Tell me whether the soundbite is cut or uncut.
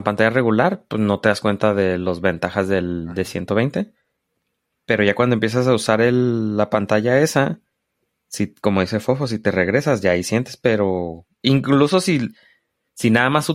uncut